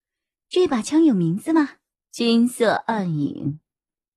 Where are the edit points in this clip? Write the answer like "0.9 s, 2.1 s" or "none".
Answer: 1.9 s